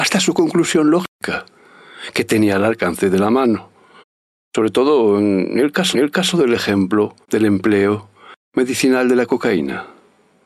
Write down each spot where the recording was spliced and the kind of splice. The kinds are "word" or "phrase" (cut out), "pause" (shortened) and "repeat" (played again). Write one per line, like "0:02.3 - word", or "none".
0:04.0 - pause
0:05.9 - repeat
0:07.2 - pause